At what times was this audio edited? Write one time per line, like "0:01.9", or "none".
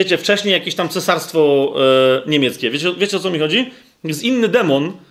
none